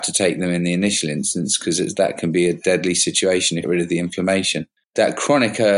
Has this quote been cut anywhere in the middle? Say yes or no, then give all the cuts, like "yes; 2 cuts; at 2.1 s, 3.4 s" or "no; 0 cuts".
yes; 2 cuts; at 3.6 s, 4.8 s